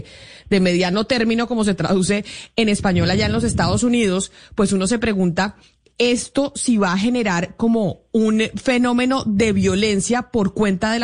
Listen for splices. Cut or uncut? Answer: uncut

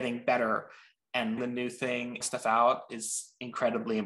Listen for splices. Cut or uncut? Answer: cut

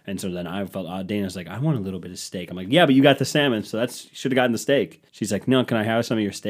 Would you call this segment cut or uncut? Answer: cut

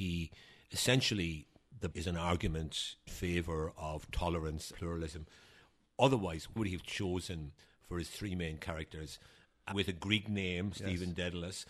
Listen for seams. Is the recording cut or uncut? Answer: cut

